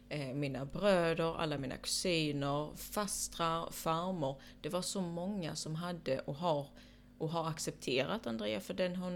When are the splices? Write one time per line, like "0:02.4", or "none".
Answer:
none